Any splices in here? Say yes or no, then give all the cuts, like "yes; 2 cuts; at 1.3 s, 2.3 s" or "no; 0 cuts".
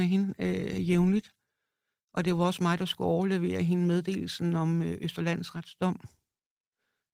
no; 0 cuts